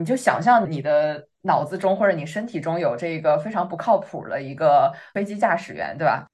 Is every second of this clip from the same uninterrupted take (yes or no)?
no